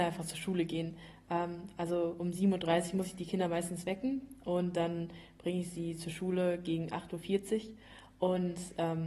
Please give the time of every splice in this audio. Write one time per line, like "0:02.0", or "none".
none